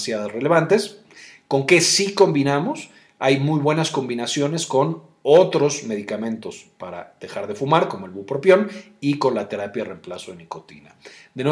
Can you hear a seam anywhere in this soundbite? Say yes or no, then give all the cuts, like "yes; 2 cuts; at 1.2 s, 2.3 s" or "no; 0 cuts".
no; 0 cuts